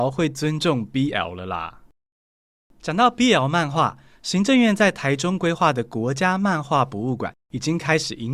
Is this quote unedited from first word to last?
yes; 0 cuts

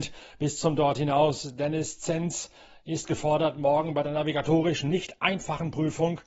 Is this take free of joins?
yes; 0 cuts

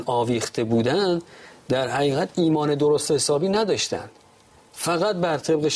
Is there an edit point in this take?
no; 0 cuts

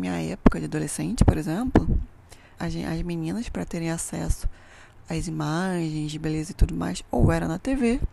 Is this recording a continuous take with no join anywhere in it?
no; 1 cut; at 2.6 s

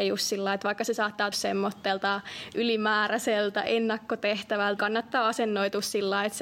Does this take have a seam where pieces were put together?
yes; 2 cuts; at 1.3 s, 4.8 s

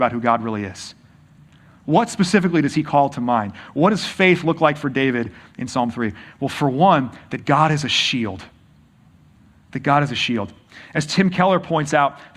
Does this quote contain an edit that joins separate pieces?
no; 0 cuts

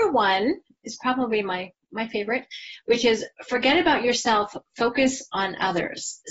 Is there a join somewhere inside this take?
no; 0 cuts

